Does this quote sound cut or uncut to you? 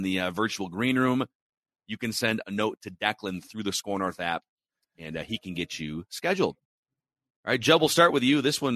uncut